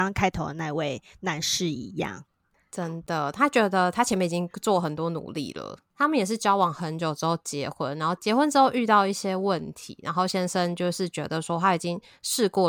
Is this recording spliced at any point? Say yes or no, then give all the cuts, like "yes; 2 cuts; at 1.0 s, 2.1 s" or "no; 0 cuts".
no; 0 cuts